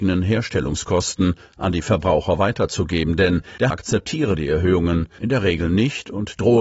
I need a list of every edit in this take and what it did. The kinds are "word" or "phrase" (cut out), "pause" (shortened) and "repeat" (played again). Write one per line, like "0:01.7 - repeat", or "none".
0:03.7 - word